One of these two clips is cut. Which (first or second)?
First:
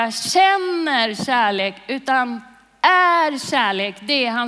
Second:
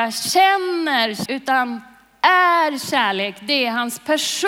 second